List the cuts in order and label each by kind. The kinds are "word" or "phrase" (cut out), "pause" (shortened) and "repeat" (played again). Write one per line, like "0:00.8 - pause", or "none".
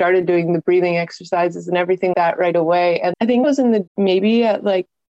0:02.1 - word
0:03.1 - word
0:03.4 - word
0:03.9 - word